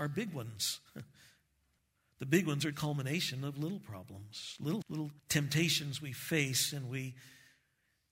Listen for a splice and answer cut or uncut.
cut